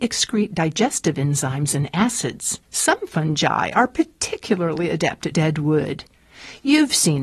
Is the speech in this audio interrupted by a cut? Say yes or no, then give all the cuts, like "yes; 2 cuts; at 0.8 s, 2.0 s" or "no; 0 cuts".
yes; 2 cuts; at 2.6 s, 5.3 s